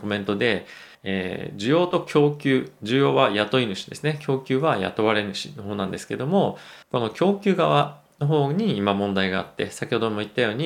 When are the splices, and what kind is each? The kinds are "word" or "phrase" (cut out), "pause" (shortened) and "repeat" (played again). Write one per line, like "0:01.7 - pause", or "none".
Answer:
0:00.9 - pause
0:06.8 - pause